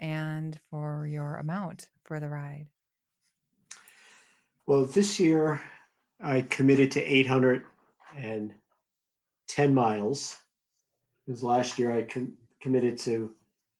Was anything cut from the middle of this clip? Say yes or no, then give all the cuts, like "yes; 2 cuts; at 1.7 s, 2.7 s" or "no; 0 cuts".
no; 0 cuts